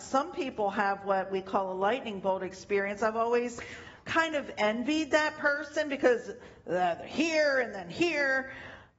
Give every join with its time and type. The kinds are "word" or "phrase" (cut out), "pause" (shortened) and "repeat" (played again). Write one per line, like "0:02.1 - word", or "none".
none